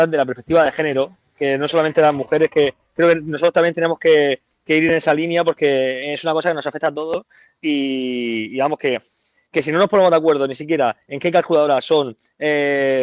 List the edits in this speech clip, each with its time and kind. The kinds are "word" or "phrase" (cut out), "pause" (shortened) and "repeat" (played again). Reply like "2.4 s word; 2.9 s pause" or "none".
none